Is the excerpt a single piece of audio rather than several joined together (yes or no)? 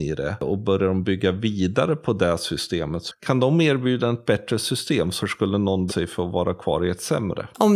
no